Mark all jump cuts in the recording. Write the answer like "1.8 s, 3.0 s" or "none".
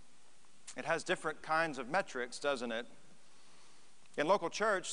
none